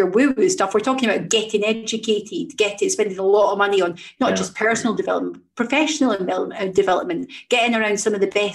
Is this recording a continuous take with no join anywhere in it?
yes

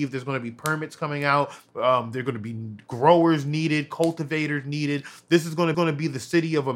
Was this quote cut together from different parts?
yes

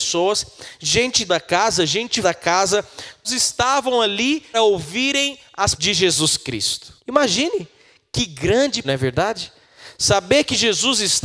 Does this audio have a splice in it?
yes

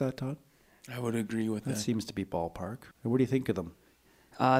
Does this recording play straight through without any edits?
no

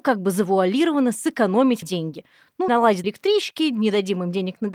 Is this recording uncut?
no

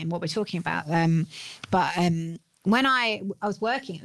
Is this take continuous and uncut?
yes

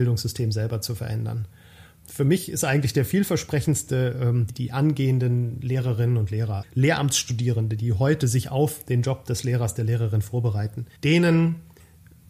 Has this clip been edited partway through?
yes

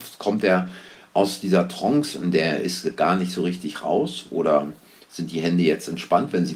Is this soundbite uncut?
yes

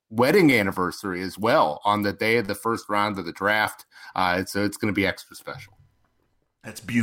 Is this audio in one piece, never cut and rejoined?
yes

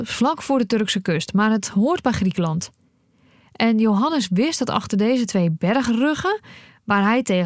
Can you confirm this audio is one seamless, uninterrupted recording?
yes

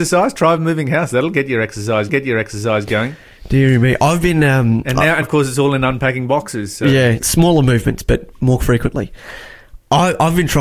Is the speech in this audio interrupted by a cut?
yes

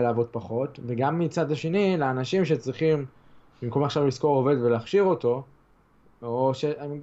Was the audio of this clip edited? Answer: no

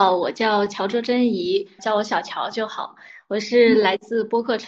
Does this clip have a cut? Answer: yes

